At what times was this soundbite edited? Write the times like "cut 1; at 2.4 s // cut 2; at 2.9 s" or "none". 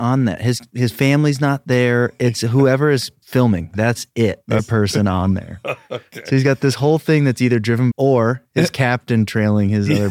cut 1; at 4.6 s // cut 2; at 7.9 s